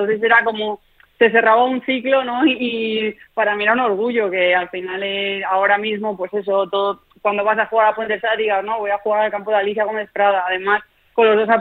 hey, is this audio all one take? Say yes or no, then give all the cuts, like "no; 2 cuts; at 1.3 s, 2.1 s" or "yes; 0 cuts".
yes; 0 cuts